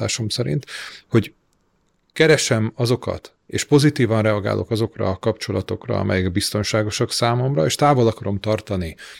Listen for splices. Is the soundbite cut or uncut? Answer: uncut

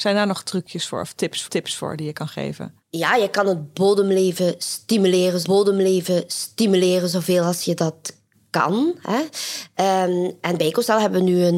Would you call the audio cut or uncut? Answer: cut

